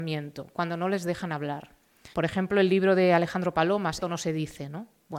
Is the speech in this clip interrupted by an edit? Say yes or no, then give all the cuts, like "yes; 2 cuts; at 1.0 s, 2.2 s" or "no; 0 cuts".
yes; 2 cuts; at 2.1 s, 4.0 s